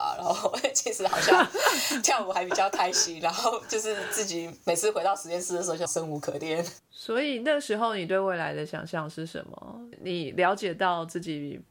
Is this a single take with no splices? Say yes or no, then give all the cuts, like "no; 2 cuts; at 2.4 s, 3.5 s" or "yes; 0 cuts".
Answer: no; 1 cut; at 5.9 s